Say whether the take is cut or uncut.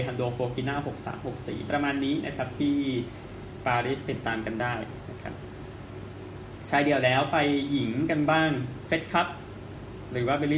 uncut